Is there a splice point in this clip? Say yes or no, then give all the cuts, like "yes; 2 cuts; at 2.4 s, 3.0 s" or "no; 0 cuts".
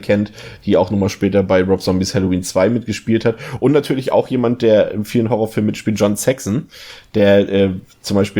no; 0 cuts